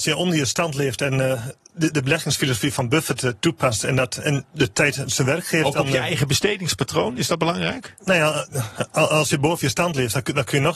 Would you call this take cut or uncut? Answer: uncut